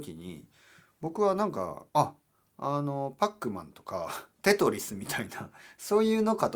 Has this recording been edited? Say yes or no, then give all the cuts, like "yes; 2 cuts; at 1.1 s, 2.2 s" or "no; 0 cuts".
yes; 2 cuts; at 1.9 s, 4.3 s